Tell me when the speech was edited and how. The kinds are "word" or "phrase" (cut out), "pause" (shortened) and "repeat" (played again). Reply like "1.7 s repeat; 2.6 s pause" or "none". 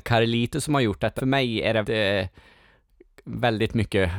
1.2 s word; 1.8 s word